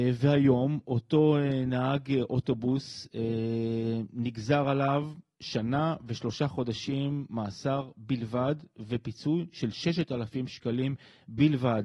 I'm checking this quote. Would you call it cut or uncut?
uncut